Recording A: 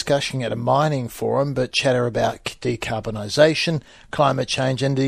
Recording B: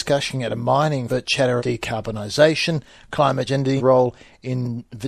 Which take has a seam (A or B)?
B